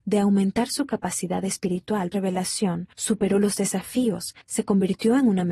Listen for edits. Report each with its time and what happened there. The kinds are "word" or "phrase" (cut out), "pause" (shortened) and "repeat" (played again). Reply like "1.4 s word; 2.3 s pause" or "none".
2.1 s phrase; 2.9 s pause; 4.4 s pause

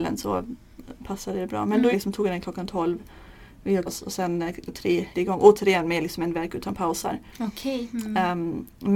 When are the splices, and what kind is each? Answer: 1.9 s phrase; 3.9 s word; 4.7 s word; 5.1 s word

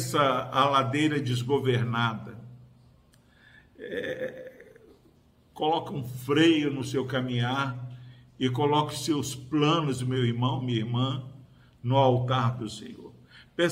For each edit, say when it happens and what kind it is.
none

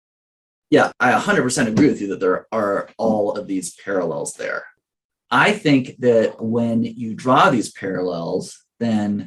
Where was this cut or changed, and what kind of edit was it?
none

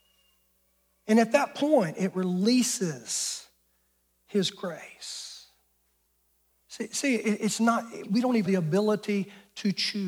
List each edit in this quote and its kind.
6.1 s pause; 8.0 s word; 8.5 s word

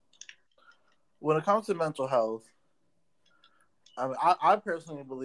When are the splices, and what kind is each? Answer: none

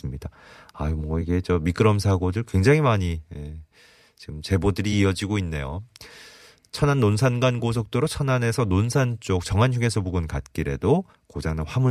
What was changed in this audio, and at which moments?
none

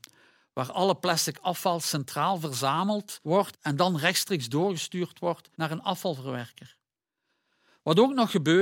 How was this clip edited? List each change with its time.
5.5 s pause

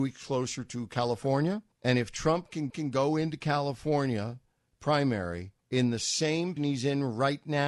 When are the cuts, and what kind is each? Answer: 1.7 s pause; 2.7 s repeat; 5.6 s pause; 6.6 s word

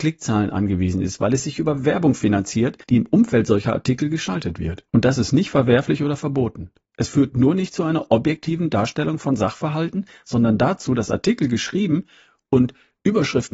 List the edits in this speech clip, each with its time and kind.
2.8 s pause; 4.9 s pause; 6.8 s pause

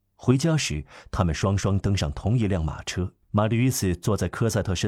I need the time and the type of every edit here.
3.2 s pause

